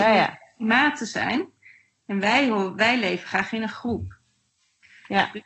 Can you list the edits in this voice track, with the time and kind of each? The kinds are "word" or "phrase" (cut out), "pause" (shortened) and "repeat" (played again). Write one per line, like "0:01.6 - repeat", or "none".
none